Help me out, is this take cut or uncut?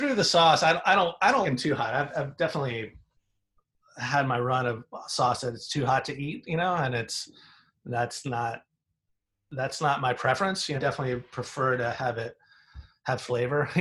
cut